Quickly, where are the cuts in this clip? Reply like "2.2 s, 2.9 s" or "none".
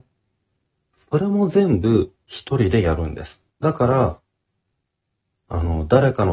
2.2 s, 3.5 s

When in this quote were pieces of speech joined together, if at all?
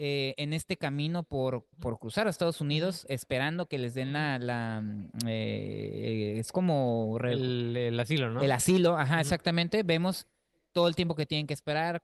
1.7 s

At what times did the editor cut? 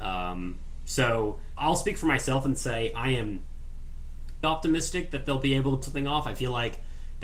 4.4 s, 5.8 s

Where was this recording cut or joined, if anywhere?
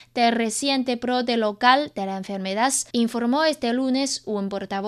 2.9 s

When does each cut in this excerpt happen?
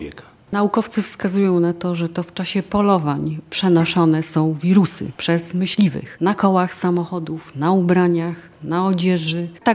none

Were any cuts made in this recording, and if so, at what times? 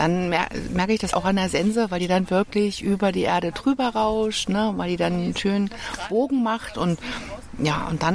1.1 s

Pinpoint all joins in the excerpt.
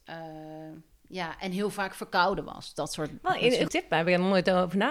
3.7 s

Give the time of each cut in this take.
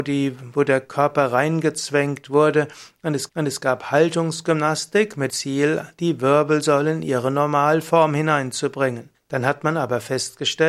3.3 s, 5.3 s, 9.1 s

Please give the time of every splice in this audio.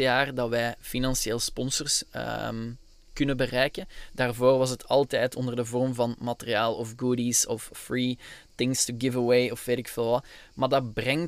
none

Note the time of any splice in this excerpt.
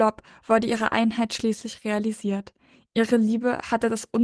none

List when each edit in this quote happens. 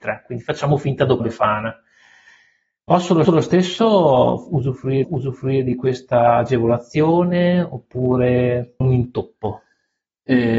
1.2 s, 3.2 s, 5.0 s, 8.8 s

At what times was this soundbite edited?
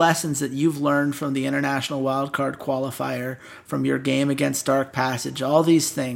none

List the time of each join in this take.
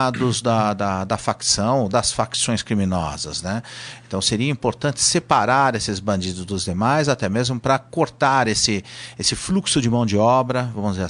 none

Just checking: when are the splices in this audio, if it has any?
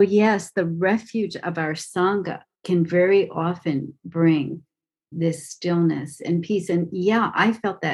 2.5 s, 5.1 s

